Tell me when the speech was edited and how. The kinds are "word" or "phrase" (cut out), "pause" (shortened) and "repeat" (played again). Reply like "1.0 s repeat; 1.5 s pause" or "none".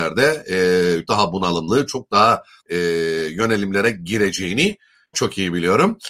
1.1 s word; 2.6 s word; 5.1 s word